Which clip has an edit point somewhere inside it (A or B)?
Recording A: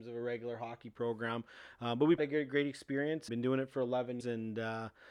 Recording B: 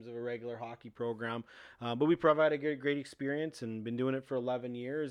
A